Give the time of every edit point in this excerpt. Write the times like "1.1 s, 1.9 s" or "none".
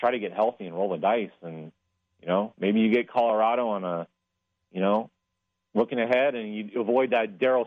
none